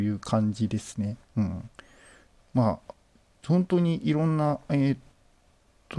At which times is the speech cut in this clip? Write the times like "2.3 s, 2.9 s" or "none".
1.2 s

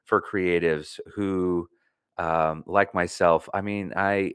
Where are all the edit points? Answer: none

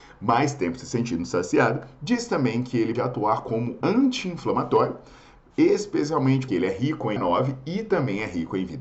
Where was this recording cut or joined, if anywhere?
3.0 s, 3.8 s, 6.5 s, 7.2 s

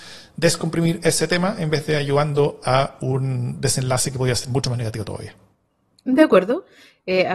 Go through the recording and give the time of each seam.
none

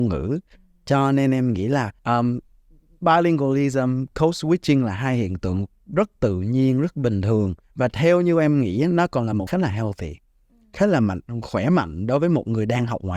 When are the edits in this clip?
2.0 s, 7.6 s, 9.5 s

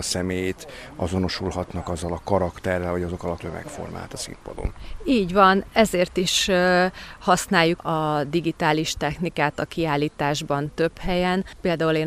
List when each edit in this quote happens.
3.4 s, 7.8 s

